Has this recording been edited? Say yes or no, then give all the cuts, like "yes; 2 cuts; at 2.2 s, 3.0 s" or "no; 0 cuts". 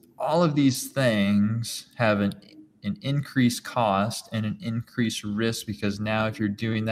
no; 0 cuts